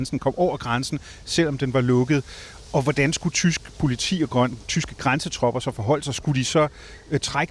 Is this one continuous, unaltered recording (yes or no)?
yes